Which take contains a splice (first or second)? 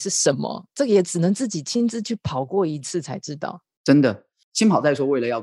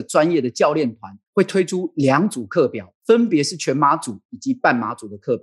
second